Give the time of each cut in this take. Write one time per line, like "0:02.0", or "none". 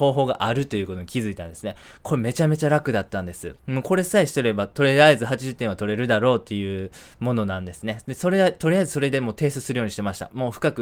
0:03.6